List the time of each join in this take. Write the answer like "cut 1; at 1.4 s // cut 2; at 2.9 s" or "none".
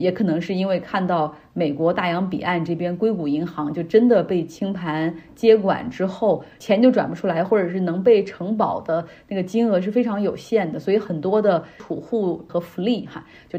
cut 1; at 12.5 s